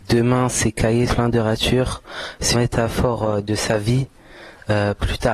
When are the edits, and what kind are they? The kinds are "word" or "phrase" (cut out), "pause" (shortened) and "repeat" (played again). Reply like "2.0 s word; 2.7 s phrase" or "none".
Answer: 1.1 s word; 2.5 s word